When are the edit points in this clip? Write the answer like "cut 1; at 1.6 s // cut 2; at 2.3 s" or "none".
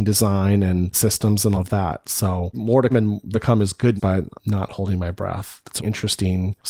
cut 1; at 0.9 s // cut 2; at 1.5 s // cut 3; at 2.5 s // cut 4; at 2.9 s // cut 5; at 3.3 s // cut 6; at 4.0 s // cut 7; at 4.4 s // cut 8; at 5.8 s